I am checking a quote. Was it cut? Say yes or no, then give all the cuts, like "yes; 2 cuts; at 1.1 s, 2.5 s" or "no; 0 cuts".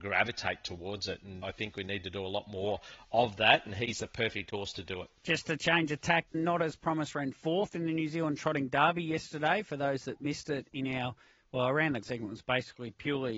yes; 4 cuts; at 1.4 s, 5.2 s, 6.3 s, 12.0 s